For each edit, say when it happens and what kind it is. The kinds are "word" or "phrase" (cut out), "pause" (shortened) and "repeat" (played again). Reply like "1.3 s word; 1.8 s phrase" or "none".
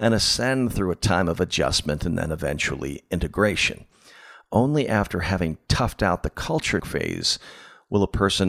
6.8 s word